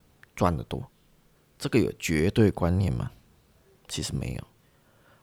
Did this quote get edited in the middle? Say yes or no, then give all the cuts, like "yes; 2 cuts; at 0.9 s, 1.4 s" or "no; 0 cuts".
yes; 1 cut; at 1.4 s